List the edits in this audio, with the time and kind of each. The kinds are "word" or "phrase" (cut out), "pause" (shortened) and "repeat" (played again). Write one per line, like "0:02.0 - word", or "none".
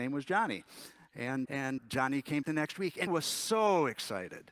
0:01.5 - word
0:01.8 - word
0:02.4 - word
0:03.1 - word